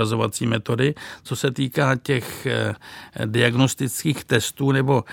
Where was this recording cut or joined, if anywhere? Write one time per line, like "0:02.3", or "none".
none